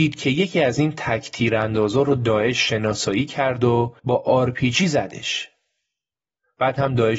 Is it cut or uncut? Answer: cut